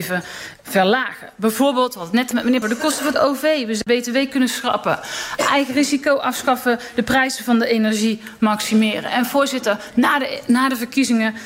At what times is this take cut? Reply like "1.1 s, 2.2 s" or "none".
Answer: 2.3 s, 2.6 s, 3.9 s